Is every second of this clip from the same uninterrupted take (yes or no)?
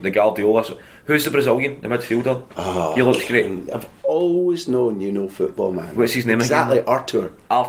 yes